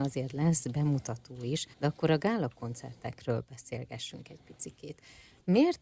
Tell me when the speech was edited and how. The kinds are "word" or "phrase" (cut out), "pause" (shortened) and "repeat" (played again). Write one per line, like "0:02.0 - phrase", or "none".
0:01.7 - pause